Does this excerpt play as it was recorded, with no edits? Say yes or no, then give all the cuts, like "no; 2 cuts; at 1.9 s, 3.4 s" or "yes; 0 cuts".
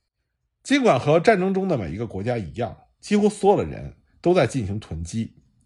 yes; 0 cuts